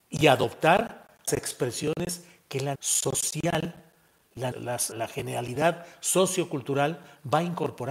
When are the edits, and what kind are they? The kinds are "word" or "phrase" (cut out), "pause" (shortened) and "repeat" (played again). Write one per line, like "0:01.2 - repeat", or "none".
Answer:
0:01.3 - word
0:02.7 - word
0:04.5 - word
0:04.9 - word